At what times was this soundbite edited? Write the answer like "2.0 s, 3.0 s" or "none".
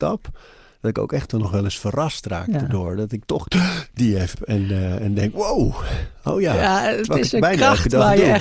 3.9 s, 4.3 s